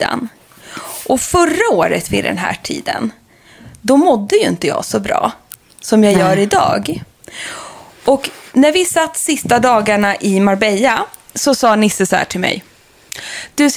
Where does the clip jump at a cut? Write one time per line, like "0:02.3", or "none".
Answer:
none